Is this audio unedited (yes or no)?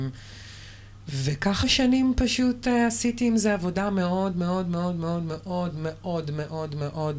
no